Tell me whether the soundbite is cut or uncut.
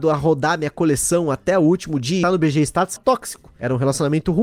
cut